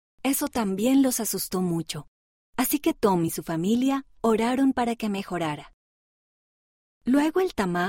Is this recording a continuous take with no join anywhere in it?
yes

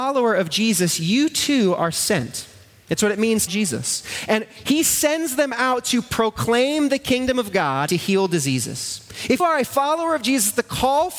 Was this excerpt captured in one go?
no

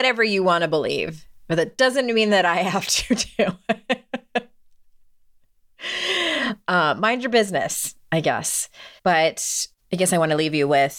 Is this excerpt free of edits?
no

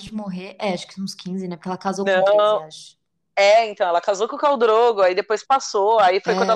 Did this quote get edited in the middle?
no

